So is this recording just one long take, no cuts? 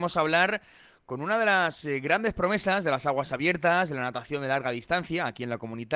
yes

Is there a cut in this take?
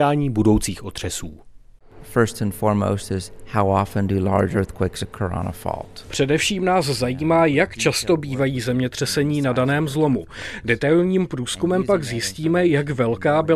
no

